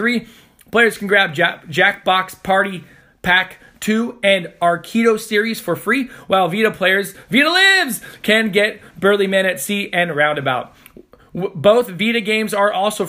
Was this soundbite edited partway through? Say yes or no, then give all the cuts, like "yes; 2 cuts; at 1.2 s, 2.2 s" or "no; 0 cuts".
no; 0 cuts